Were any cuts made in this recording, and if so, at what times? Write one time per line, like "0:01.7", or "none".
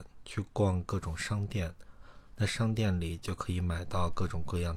none